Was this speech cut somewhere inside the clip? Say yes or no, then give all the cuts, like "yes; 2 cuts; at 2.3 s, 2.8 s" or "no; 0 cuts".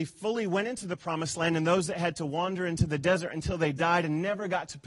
no; 0 cuts